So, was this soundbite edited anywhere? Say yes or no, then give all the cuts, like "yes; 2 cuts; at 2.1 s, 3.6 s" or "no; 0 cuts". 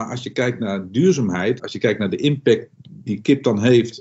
yes; 2 cuts; at 1.6 s, 3.1 s